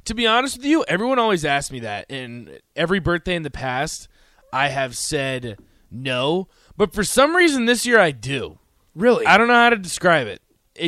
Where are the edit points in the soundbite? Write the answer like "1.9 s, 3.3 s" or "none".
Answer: none